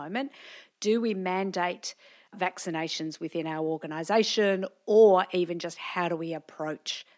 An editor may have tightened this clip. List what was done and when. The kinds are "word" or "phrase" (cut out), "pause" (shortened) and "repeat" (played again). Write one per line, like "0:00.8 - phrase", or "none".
none